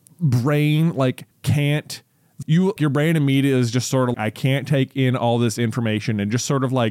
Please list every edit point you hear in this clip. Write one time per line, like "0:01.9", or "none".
0:01.3
0:02.4
0:02.8
0:04.1